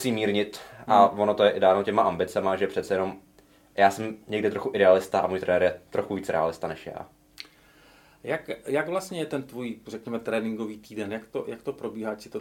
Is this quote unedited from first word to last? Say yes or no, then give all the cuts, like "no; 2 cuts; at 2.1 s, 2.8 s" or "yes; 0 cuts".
yes; 0 cuts